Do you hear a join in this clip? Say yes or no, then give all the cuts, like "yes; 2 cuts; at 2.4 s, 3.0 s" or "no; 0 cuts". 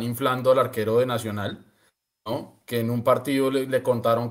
no; 0 cuts